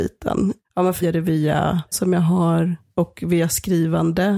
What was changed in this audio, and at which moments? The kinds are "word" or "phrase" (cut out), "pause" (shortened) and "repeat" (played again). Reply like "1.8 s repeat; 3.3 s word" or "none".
1.0 s word; 1.9 s word